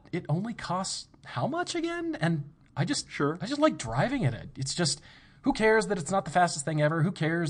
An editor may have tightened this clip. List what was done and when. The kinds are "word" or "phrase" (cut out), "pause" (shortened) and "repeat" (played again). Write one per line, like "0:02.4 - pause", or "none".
none

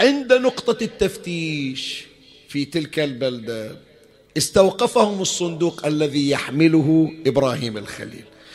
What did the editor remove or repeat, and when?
none

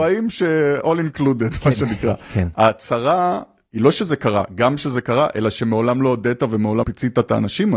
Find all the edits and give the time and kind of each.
0:06.8 - word

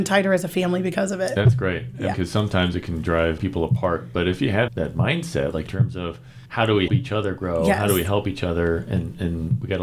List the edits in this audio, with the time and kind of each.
0:02.1 - word
0:03.4 - word
0:04.7 - word
0:05.7 - phrase
0:06.5 - pause
0:06.9 - word

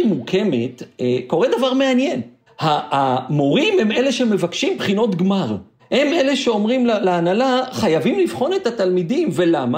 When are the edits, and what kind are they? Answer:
0:02.5 - pause
0:05.8 - pause

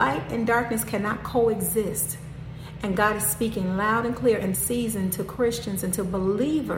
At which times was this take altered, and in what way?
0:04.5 - word

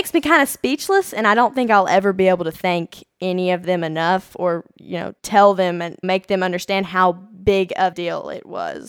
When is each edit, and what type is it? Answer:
0:05.2 - pause
0:06.0 - phrase
0:07.9 - word

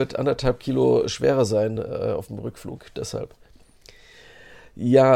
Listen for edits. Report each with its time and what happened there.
none

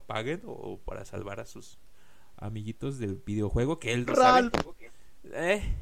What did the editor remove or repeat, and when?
none

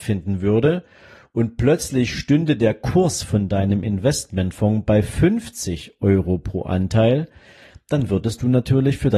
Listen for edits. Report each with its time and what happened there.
none

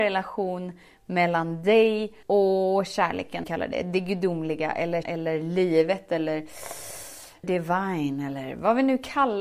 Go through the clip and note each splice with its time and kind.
0:02.2 - pause
0:03.4 - phrase
0:05.0 - word
0:07.4 - word

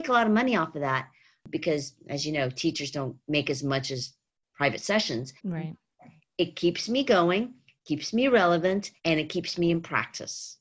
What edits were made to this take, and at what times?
0:05.4 - pause
0:09.0 - pause

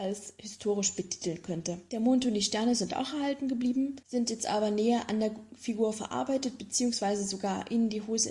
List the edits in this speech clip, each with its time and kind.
0:04.0 - pause

